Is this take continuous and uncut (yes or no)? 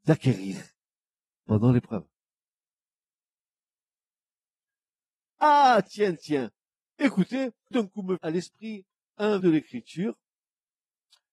no